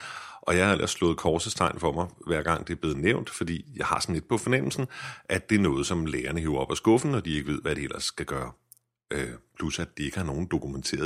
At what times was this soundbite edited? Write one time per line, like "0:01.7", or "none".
none

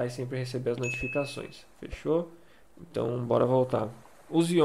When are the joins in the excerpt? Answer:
0:02.5

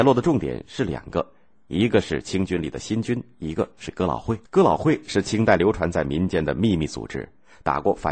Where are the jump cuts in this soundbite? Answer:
0:04.4

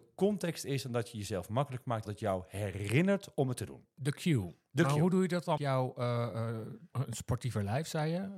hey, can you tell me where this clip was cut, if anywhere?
0:02.1
0:05.6
0:06.9

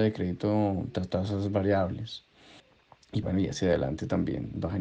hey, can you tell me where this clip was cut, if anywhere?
0:03.2

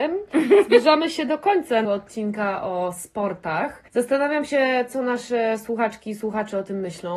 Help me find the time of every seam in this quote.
0:01.8
0:03.9

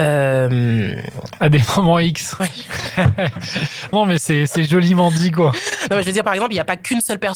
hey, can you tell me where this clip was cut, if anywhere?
0:02.4
0:03.9

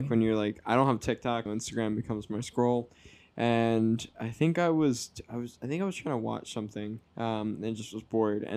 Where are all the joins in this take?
0:01.5
0:07.1

